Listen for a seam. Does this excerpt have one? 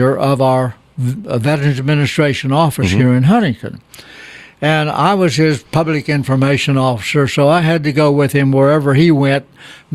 no; 0 cuts

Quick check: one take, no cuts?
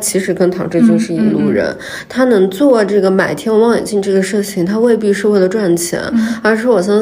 yes; 0 cuts

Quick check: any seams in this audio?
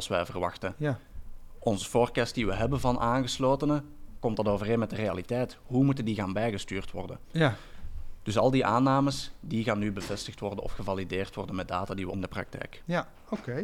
yes; 1 cut; at 12.1 s

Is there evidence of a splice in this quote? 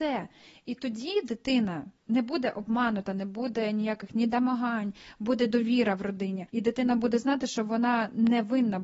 yes; 2 cuts; at 2.0 s, 6.5 s

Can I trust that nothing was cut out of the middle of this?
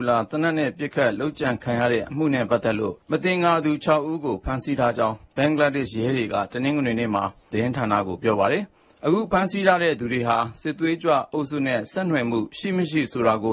no; 2 cuts; at 3.0 s, 7.5 s

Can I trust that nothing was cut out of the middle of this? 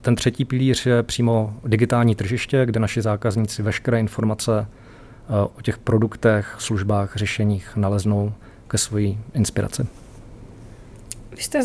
yes; 0 cuts

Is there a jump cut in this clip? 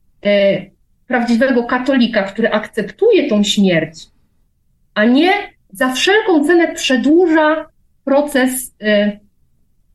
no; 0 cuts

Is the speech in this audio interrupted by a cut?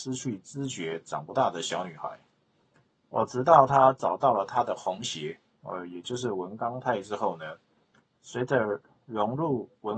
no; 0 cuts

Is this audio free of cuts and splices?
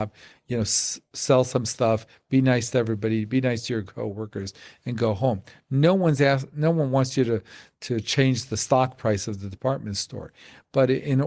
yes; 0 cuts

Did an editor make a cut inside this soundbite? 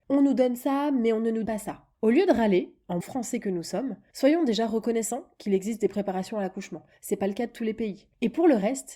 yes; 2 cuts; at 1.5 s, 3.0 s

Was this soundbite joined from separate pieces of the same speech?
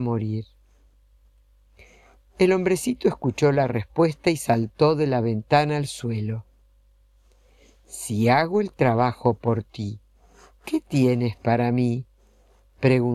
no; 0 cuts

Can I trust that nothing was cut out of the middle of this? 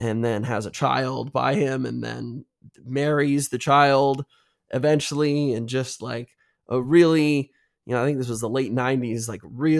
yes; 0 cuts

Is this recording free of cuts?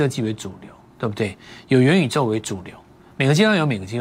yes; 0 cuts

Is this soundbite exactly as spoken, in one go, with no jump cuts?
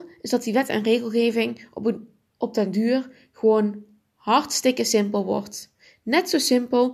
yes; 0 cuts

